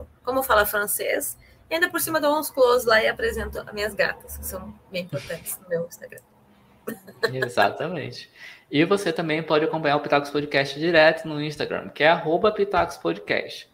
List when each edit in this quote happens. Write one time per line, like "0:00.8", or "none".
none